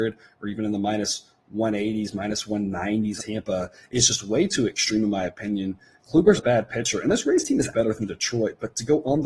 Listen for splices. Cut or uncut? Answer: cut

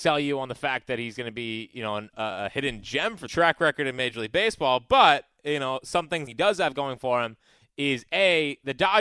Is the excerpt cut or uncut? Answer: cut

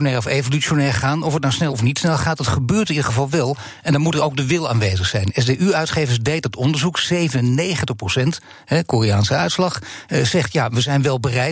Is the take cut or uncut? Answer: cut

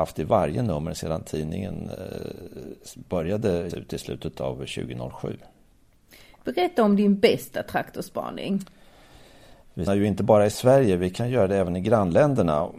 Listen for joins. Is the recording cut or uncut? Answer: cut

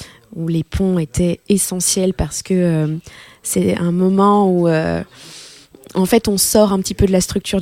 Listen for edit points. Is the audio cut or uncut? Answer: uncut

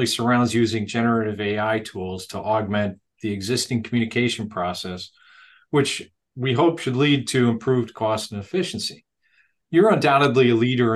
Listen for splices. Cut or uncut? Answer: uncut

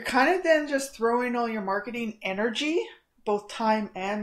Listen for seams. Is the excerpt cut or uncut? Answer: uncut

